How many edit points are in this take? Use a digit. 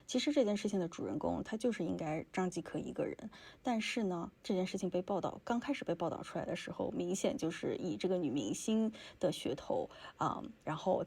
1